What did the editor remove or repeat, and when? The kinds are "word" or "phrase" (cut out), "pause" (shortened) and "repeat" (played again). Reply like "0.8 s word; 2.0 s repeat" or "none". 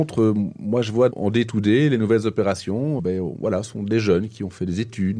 1.1 s word; 3.0 s word

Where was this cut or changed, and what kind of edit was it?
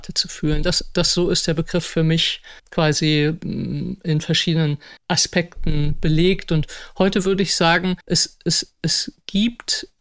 2.6 s pause; 5.0 s pause; 8.0 s pause

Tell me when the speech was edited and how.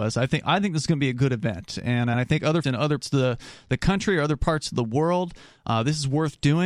2.1 s word; 2.6 s word; 3.0 s word

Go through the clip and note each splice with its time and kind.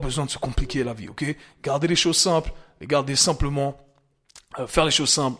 none

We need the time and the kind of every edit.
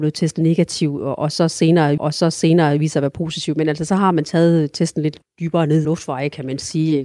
2.0 s repeat; 5.2 s pause; 5.8 s phrase

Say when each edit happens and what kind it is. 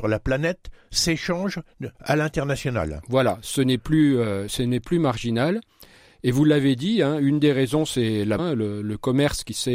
1.9 s pause; 8.4 s word

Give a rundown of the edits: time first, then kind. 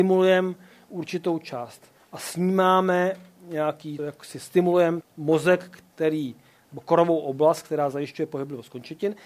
2.0 s word; 4.0 s word; 5.0 s word

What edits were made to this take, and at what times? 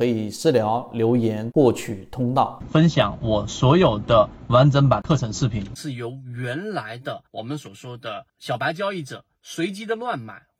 7.3 s pause; 8.3 s pause

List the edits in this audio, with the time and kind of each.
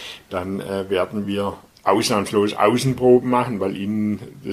none

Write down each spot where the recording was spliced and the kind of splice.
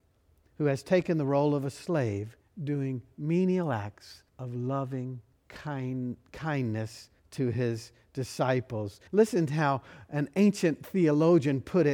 2.4 s pause; 4.3 s pause; 5.3 s pause; 7.2 s pause; 9.1 s pause

